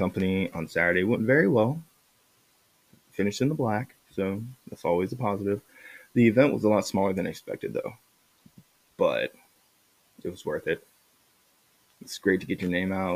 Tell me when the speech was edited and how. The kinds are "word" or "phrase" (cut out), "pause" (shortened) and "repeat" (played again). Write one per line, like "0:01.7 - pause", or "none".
0:04.0 - pause